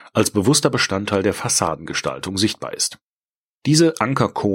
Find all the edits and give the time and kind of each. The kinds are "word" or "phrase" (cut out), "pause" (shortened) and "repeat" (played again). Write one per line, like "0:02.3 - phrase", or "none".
none